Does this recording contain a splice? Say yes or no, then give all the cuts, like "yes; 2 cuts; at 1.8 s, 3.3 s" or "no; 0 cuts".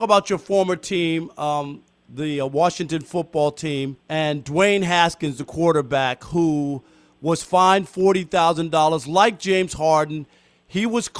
yes; 2 cuts; at 1.9 s, 4.0 s